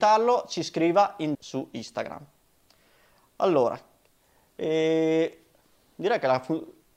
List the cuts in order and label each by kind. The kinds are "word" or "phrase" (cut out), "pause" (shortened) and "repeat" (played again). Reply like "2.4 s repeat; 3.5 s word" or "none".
1.3 s word